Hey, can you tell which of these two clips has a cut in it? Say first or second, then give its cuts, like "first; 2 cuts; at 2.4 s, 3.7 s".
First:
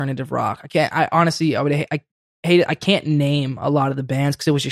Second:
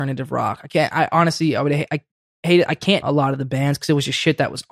second; 1 cut; at 3.0 s